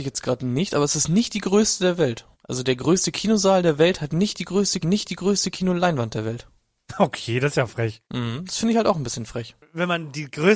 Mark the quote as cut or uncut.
cut